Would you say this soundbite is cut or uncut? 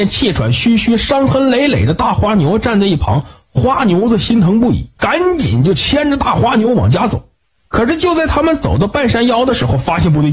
cut